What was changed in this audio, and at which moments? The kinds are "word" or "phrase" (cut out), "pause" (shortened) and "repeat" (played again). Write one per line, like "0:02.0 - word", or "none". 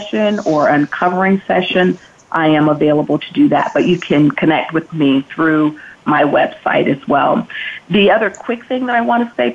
none